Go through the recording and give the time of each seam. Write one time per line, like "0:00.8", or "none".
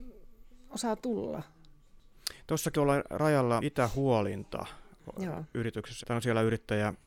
0:02.7
0:03.6
0:06.0